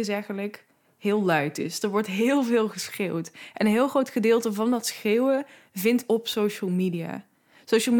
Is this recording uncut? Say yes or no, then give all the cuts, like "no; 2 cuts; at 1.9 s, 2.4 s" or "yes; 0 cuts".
no; 1 cut; at 6.1 s